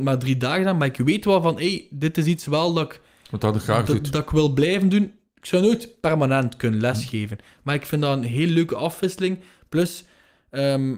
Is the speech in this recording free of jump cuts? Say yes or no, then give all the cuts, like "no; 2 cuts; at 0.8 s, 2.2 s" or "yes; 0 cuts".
yes; 0 cuts